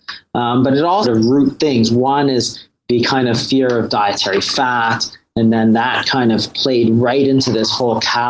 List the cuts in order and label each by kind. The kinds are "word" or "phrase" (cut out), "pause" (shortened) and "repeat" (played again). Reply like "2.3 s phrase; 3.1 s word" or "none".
1.0 s phrase